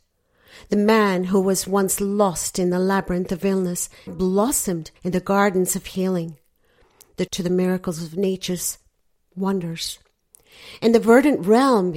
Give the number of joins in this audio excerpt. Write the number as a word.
three